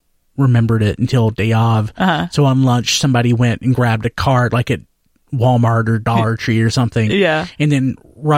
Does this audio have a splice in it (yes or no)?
no